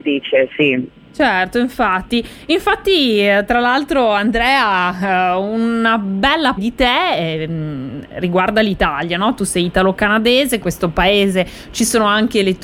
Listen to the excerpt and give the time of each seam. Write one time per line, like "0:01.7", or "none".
0:06.6
0:10.6